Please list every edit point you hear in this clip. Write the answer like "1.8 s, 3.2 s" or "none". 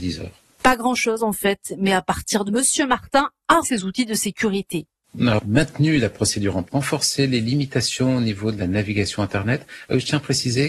2.5 s, 3.6 s, 6.6 s